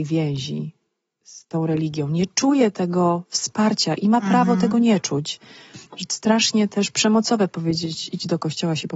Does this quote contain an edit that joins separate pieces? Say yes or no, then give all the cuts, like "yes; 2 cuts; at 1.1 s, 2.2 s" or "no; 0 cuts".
yes; 1 cut; at 6.1 s